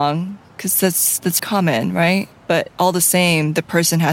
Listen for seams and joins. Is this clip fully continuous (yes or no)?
no